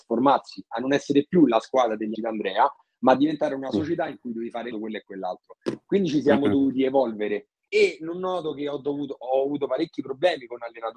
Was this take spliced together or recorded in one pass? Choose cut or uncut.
cut